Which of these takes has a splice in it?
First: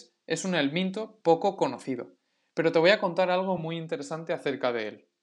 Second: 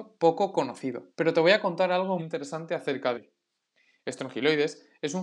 second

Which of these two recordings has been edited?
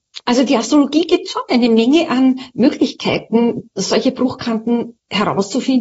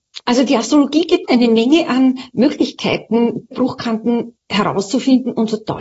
second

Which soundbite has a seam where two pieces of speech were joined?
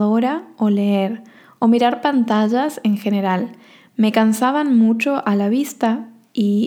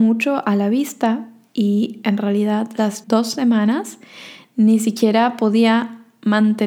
second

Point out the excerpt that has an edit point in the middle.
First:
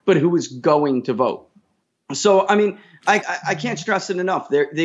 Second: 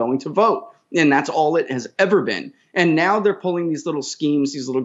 first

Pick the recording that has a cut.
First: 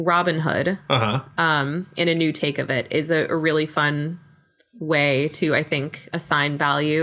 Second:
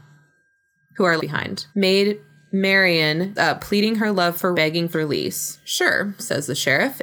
second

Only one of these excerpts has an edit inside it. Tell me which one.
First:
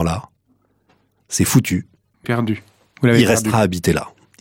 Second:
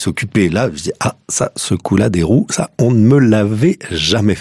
first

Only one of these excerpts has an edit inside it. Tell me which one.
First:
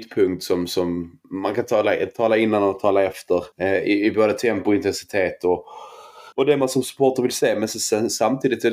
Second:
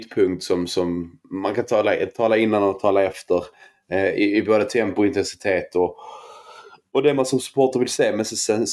first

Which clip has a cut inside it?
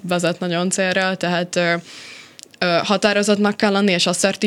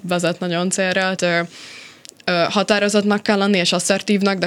second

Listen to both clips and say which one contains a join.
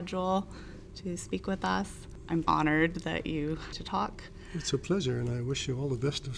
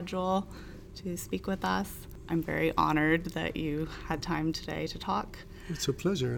first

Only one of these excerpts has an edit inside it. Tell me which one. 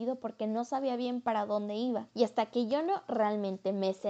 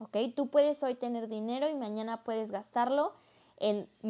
first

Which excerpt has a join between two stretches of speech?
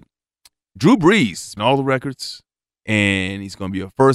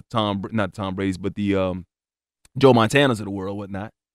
first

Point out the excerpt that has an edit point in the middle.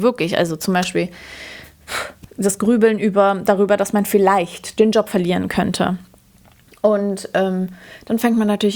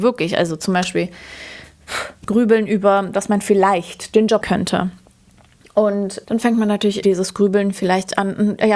second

